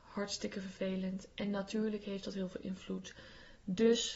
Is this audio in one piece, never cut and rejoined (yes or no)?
yes